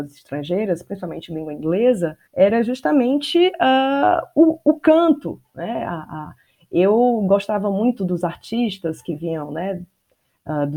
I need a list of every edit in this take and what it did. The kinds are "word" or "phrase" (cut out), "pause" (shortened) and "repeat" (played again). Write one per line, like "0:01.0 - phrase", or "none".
0:02.3 - pause